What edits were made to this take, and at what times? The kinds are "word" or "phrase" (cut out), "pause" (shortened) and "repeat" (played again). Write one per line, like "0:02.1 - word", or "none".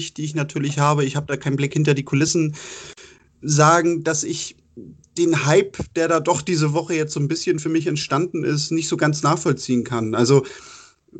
none